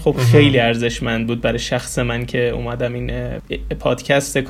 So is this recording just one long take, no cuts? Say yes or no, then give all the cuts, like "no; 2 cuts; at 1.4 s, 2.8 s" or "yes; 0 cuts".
yes; 0 cuts